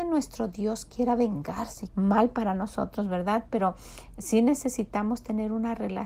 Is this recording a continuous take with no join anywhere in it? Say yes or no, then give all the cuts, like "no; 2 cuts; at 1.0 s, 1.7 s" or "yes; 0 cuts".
no; 1 cut; at 1.9 s